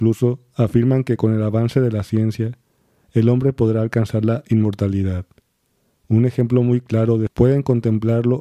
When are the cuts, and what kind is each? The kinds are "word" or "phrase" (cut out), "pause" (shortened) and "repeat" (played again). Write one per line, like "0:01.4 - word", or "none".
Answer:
0:07.3 - phrase